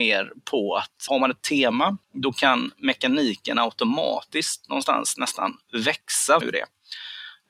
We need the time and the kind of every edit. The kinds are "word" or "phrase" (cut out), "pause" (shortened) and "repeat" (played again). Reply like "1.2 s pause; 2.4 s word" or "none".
1.1 s word; 1.4 s word; 2.0 s pause; 6.4 s word